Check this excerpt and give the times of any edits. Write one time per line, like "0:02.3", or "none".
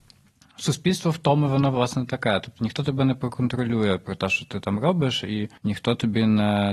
0:05.6